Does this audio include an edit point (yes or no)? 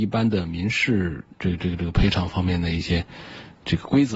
yes